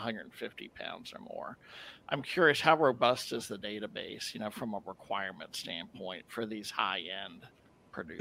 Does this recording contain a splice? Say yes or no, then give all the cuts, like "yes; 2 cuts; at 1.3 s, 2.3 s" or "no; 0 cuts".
no; 0 cuts